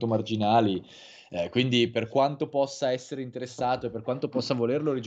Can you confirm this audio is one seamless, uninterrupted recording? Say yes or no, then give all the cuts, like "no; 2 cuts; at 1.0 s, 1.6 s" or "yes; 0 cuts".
yes; 0 cuts